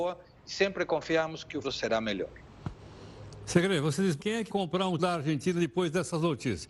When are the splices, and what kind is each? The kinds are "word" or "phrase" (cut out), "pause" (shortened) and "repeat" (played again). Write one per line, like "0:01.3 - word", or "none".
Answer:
0:01.6 - word
0:04.2 - word
0:04.5 - word
0:05.0 - word